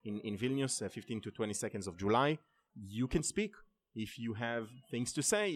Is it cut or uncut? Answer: uncut